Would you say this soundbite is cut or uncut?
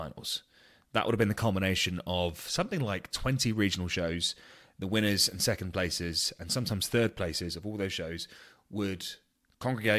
uncut